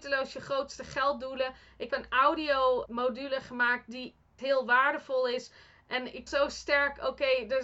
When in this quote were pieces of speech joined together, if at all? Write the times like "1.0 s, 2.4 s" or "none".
1.9 s, 2.9 s, 4.4 s, 6.3 s